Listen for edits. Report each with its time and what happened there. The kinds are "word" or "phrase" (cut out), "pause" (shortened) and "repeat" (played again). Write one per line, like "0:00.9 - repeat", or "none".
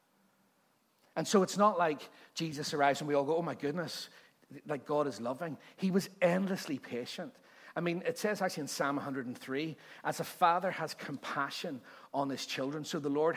none